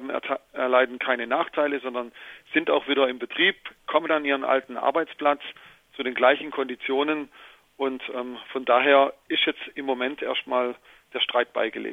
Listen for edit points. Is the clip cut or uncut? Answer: uncut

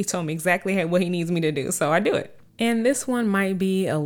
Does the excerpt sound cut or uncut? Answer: cut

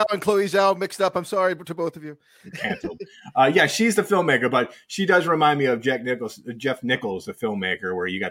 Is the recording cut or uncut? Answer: uncut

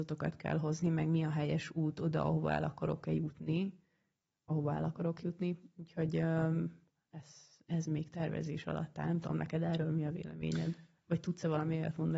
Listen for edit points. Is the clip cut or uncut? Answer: uncut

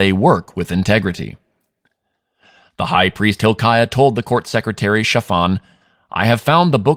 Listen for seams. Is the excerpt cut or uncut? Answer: uncut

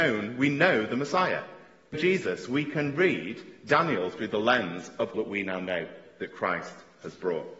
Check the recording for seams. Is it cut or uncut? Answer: cut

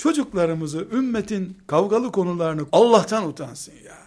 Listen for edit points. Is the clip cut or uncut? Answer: cut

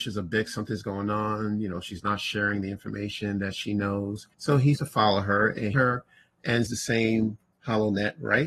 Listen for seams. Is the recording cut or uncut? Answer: cut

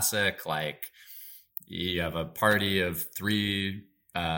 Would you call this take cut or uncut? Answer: uncut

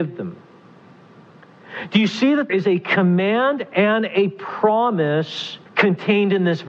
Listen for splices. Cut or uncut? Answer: cut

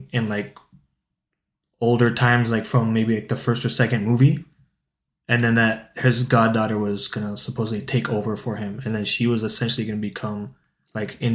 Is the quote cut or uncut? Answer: uncut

